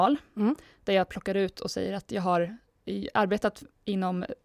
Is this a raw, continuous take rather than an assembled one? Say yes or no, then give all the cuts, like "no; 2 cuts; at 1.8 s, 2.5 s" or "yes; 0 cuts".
yes; 0 cuts